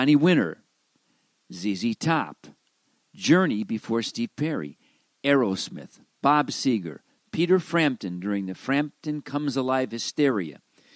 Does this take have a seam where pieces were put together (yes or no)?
no